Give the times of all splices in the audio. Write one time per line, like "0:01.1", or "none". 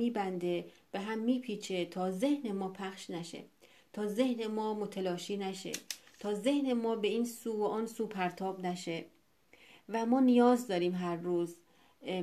none